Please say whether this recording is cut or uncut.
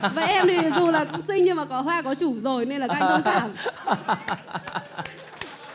uncut